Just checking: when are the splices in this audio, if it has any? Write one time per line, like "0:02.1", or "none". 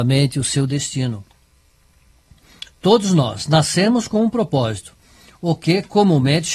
none

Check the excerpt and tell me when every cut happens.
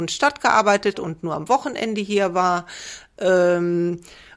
0:00.9

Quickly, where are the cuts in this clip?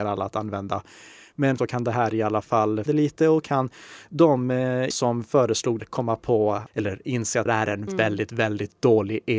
0:01.6
0:02.9
0:03.4
0:04.9
0:05.8
0:06.7
0:07.5
0:07.9

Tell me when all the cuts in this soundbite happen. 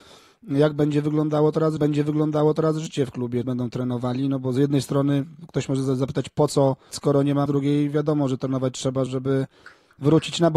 0:01.8
0:03.4
0:06.9
0:07.5
0:09.1

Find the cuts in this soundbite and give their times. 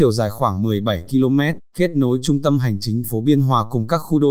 0:03.0

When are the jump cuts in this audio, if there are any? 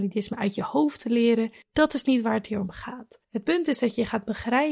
0:03.2

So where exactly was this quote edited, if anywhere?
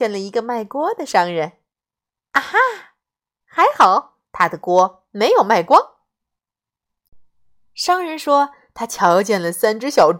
0:04.3

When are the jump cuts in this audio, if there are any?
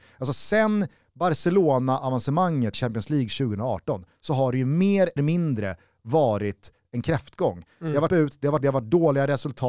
0:02.7
0:05.2
0:08.1
0:08.6

